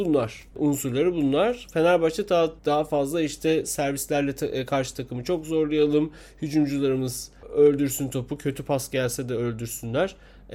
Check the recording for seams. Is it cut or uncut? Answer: cut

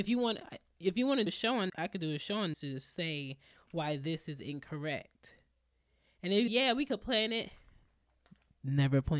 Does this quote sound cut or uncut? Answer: cut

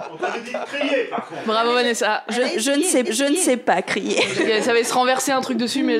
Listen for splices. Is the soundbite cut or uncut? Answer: cut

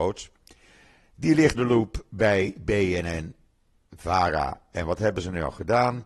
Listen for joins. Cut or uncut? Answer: cut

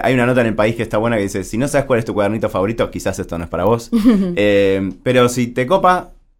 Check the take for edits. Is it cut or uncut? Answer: uncut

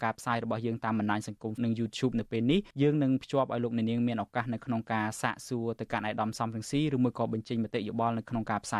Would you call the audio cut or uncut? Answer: cut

